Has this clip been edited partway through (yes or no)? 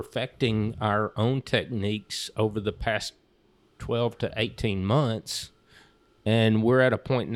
no